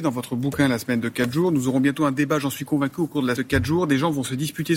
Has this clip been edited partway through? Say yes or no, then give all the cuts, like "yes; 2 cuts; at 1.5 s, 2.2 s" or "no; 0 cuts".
yes; 1 cut; at 3.4 s